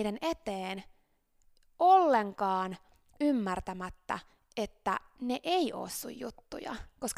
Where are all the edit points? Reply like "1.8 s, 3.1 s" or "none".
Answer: none